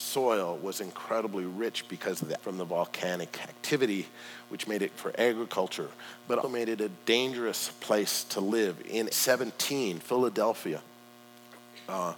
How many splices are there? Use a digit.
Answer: 4